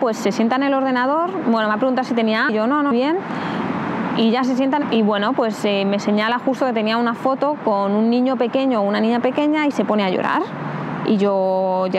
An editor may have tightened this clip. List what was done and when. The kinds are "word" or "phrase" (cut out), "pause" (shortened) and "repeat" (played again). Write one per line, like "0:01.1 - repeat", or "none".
0:02.5 - word
0:02.9 - word
0:04.8 - phrase